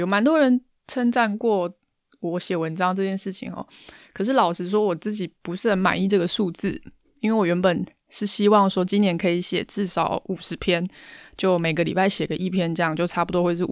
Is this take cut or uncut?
uncut